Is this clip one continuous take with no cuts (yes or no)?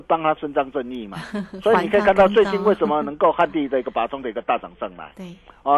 yes